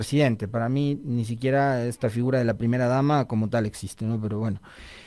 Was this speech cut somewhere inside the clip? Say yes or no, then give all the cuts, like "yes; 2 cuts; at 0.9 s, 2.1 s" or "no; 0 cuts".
no; 0 cuts